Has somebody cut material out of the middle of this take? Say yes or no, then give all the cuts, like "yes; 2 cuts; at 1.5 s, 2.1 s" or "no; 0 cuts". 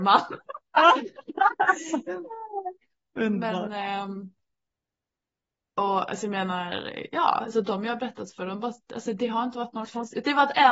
no; 0 cuts